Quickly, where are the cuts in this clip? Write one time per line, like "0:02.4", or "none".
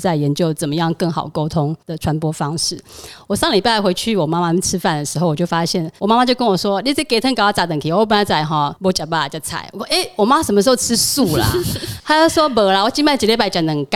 0:01.8
0:06.0